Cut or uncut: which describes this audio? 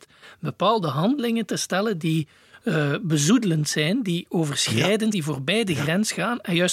cut